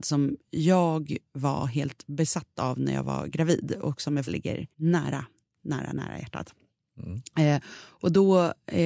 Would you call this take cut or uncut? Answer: cut